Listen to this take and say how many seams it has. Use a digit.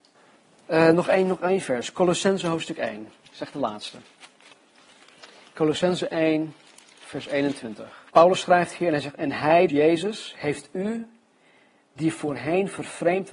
3